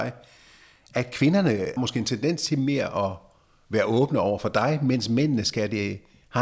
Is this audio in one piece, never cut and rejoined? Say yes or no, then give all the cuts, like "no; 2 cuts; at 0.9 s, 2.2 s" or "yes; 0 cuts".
no; 1 cut; at 1.8 s